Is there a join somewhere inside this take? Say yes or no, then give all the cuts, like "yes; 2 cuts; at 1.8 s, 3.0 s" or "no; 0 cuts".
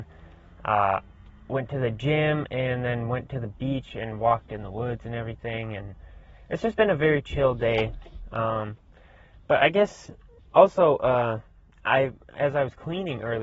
no; 0 cuts